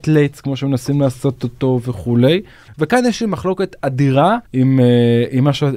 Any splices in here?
yes; 2 cuts; at 2.7 s, 4.5 s

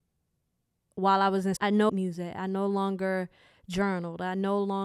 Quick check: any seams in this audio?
yes; 2 cuts; at 1.6 s, 1.9 s

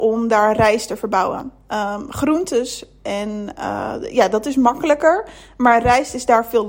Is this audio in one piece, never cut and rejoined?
yes; 0 cuts

